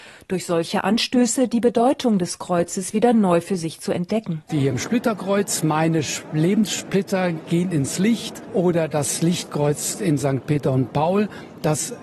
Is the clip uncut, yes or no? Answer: yes